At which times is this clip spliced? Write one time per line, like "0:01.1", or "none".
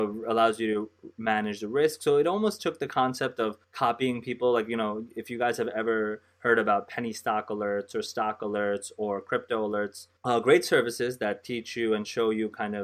0:03.6
0:10.2